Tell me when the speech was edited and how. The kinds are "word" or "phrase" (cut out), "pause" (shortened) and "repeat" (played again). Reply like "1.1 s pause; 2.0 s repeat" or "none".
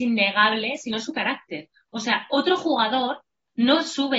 none